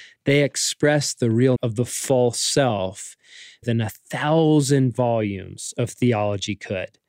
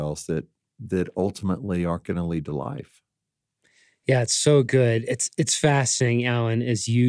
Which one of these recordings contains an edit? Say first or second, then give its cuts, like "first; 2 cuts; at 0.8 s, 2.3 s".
first; 2 cuts; at 1.6 s, 3.6 s